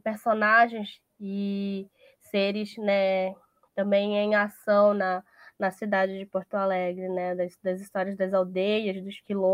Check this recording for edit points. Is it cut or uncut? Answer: uncut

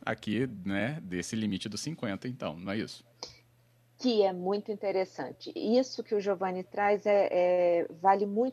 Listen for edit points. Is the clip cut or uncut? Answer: uncut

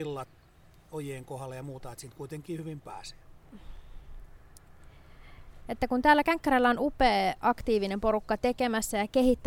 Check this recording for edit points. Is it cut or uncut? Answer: uncut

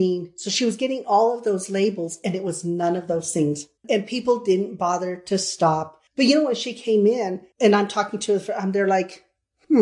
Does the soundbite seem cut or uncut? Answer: cut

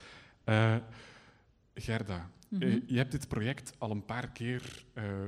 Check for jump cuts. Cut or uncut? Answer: uncut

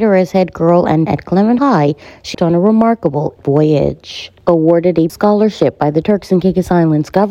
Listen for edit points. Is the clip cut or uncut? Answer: cut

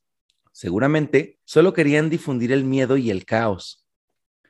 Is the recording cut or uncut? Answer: cut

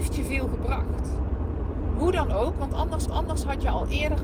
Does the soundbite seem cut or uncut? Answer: cut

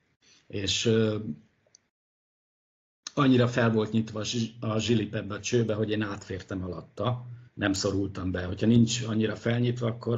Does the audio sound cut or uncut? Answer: cut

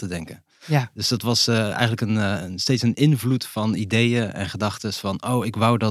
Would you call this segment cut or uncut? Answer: uncut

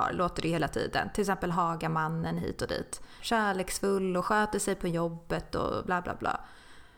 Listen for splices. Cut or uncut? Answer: uncut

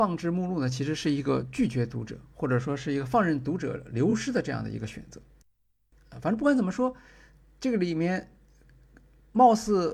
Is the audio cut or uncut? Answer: uncut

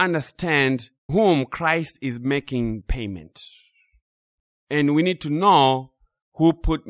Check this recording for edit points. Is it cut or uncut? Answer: cut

